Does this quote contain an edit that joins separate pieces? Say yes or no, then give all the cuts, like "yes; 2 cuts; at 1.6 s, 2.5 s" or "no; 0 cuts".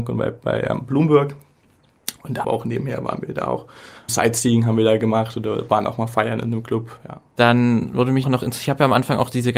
yes; 3 cuts; at 2.4 s, 4.1 s, 8.2 s